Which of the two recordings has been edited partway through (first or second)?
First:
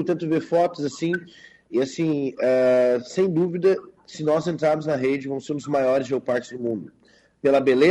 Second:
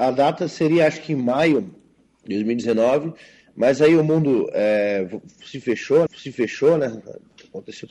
second